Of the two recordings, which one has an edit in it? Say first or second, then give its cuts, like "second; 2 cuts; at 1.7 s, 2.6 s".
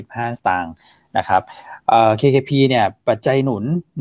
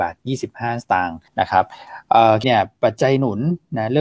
second; 2 cuts; at 1.3 s, 2.4 s